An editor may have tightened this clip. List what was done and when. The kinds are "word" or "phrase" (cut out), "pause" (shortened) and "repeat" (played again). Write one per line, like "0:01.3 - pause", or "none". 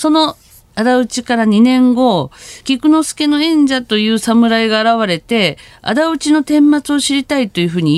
0:02.6 - pause